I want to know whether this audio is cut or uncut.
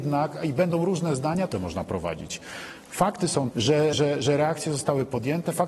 cut